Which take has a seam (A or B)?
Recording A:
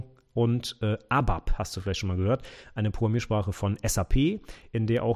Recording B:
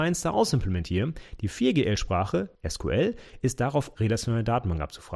B